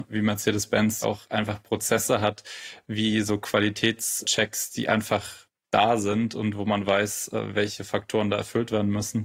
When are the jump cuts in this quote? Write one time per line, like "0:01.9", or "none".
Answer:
0:01.0